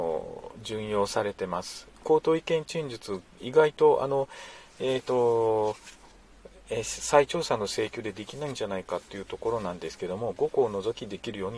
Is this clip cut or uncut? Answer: uncut